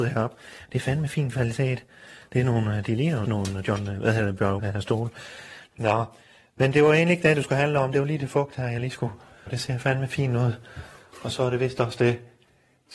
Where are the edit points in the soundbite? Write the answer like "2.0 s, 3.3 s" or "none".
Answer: 3.2 s, 4.6 s, 6.7 s, 9.5 s